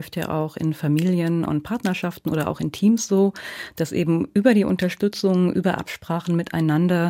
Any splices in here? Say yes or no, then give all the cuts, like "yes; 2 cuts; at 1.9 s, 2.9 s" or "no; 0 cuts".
no; 0 cuts